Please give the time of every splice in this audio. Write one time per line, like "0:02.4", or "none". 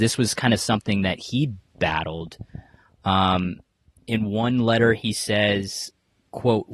none